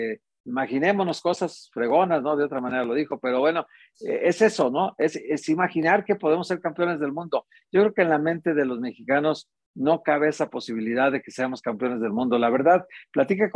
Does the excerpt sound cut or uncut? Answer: uncut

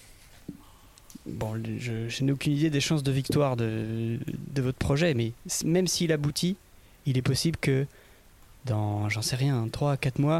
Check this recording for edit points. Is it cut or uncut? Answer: uncut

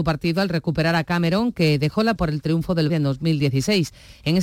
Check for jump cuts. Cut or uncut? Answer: cut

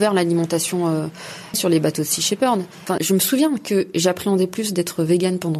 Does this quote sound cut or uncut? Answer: cut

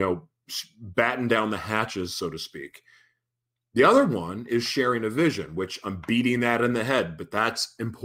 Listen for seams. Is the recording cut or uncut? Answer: uncut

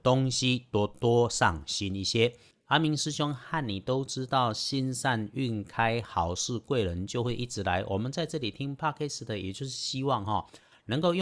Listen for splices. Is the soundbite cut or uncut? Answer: uncut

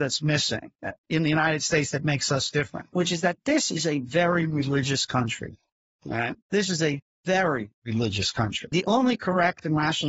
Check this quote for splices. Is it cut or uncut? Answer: cut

